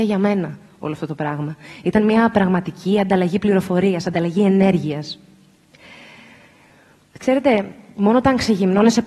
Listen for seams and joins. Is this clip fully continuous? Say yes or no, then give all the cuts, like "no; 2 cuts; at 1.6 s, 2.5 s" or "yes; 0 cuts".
yes; 0 cuts